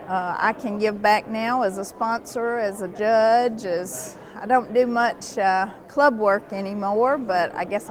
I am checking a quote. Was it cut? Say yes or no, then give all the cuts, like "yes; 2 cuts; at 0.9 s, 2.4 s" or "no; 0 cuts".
no; 0 cuts